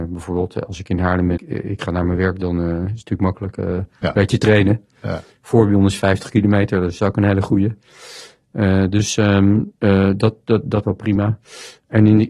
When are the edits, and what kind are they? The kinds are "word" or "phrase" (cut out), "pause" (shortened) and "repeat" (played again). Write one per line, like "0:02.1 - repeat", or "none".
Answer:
0:01.4 - phrase
0:09.8 - pause
0:10.8 - word